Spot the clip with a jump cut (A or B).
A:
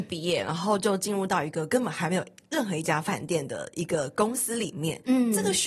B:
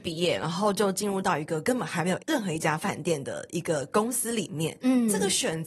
B